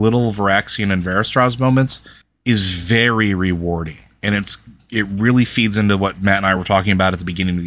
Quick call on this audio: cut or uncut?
uncut